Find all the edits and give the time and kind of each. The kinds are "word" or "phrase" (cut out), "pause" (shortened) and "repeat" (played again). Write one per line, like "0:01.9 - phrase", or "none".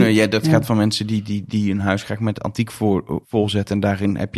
0:03.2 - pause